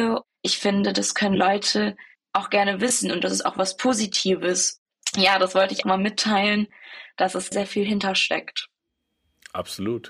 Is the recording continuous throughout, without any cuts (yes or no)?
no